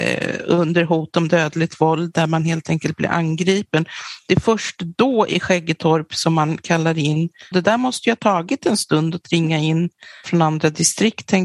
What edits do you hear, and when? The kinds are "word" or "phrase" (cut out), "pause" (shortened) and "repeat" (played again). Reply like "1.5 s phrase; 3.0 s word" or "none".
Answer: 7.5 s phrase; 10.2 s word